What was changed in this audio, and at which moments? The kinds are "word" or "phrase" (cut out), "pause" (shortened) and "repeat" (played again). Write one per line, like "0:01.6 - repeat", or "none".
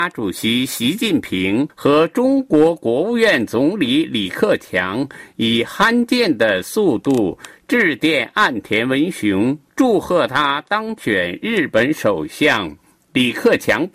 0:01.7 - pause